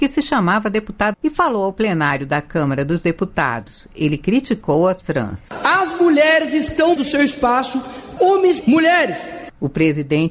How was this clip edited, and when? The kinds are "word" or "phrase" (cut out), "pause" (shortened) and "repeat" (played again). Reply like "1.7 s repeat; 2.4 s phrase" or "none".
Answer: 1.1 s word; 5.0 s word; 7.0 s word; 8.2 s word; 8.6 s phrase